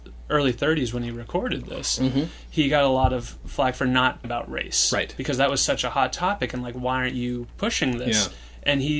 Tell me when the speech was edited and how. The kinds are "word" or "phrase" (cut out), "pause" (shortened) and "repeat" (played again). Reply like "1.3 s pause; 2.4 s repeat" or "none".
4.2 s word